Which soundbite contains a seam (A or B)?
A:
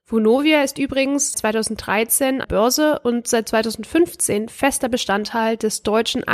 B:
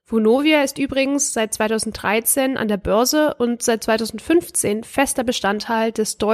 A